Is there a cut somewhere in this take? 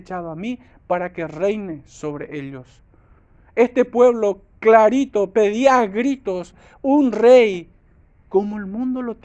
no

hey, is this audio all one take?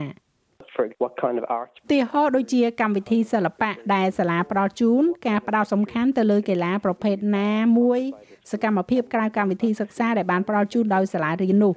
no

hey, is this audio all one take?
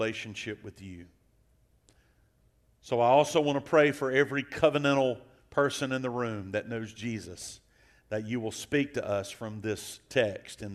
yes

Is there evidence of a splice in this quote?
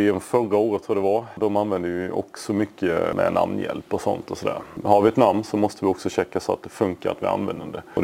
no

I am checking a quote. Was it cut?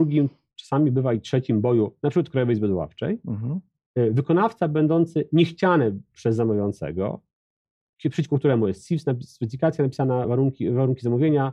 no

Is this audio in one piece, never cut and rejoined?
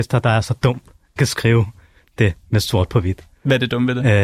no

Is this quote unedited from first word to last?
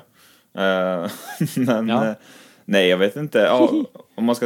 yes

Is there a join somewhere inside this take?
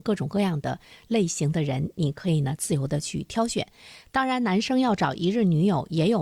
no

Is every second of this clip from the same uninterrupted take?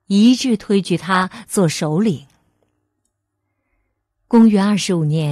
yes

